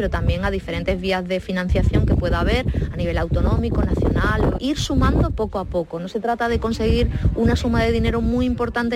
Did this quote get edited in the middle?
yes; 1 cut; at 4.6 s

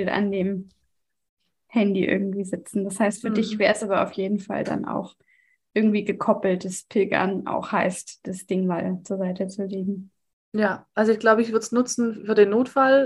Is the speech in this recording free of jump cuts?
yes; 0 cuts

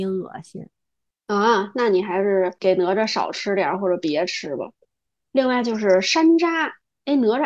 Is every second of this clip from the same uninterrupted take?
yes; 0 cuts

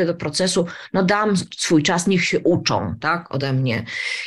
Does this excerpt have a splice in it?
no; 0 cuts

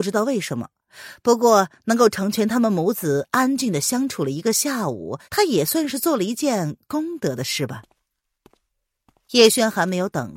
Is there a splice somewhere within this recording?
yes; 1 cut; at 5.2 s

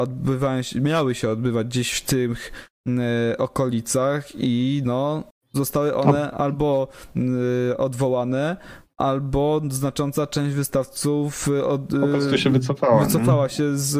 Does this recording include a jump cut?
yes; 1 cut; at 5.3 s

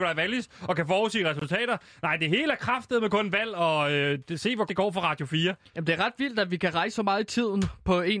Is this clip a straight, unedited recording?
no; 1 cut; at 4.7 s

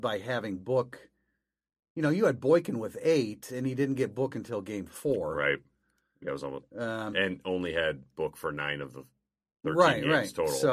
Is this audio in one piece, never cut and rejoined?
yes; 0 cuts

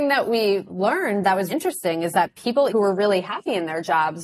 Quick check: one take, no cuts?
no; 2 cuts; at 1.5 s, 2.7 s

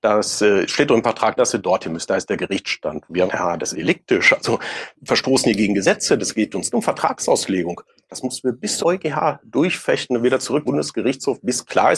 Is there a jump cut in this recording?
yes; 7 cuts; at 1.4 s, 3.3 s, 3.7 s, 4.9 s, 6.7 s, 8.8 s, 10.7 s

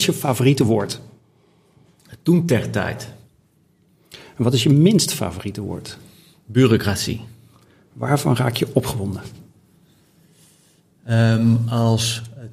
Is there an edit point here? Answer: no; 0 cuts

